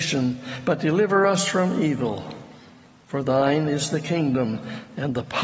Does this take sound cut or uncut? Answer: uncut